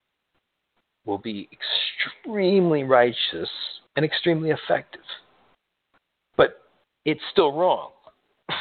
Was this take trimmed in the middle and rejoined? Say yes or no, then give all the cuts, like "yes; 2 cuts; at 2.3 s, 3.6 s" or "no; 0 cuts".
yes; 1 cut; at 3.9 s